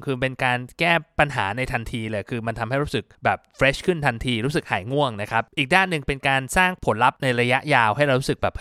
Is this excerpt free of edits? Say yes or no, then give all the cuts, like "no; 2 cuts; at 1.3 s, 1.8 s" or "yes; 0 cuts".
no; 2 cuts; at 3.1 s, 5.5 s